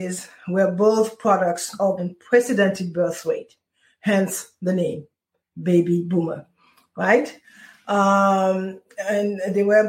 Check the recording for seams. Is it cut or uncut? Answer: cut